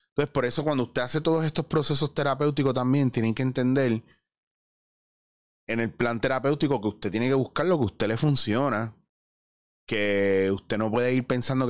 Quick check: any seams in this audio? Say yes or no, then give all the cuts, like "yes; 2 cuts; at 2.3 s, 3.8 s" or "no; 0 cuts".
no; 0 cuts